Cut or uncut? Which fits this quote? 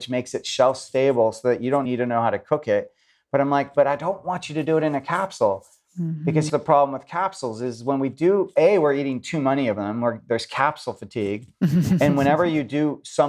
cut